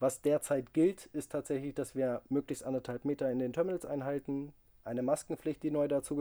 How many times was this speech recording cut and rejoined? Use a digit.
0